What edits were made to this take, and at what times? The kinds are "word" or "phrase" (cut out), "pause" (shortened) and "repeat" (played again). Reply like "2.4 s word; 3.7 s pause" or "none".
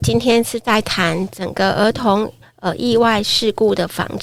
none